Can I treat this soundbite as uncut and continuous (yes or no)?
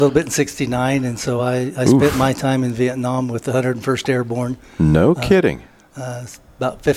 yes